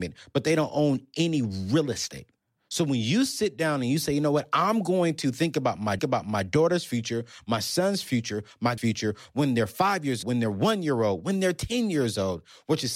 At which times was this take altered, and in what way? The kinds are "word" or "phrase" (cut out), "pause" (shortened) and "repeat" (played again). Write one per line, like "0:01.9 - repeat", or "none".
0:02.4 - pause
0:06.0 - repeat
0:08.8 - word
0:10.2 - word